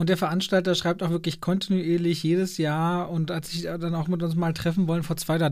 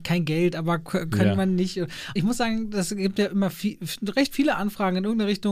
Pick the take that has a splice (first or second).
second